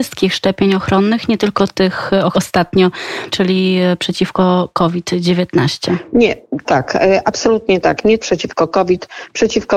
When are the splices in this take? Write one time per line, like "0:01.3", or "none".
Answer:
0:02.3
0:03.3
0:06.6
0:08.2